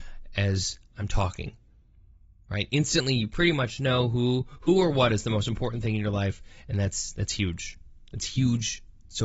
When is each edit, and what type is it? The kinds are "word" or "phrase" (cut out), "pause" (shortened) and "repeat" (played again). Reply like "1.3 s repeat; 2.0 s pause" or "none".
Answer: none